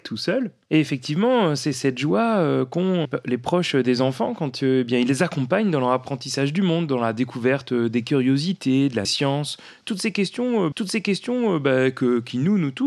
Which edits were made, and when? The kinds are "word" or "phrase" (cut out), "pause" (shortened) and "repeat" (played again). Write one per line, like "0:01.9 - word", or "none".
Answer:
0:03.0 - word
0:09.0 - phrase
0:10.7 - repeat